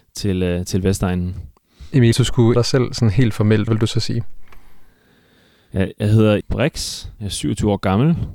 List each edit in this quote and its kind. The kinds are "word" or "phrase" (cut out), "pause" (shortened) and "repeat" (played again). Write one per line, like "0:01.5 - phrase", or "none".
0:02.1 - word
0:02.5 - word
0:03.7 - word
0:06.4 - word